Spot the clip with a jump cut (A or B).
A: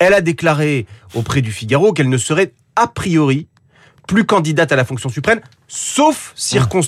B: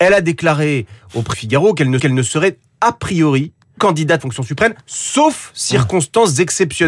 B